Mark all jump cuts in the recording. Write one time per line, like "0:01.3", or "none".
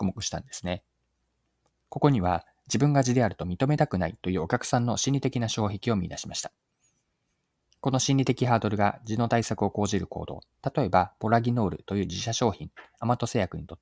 none